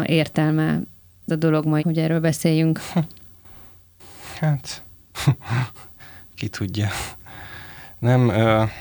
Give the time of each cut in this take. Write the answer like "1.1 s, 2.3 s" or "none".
1.3 s, 1.8 s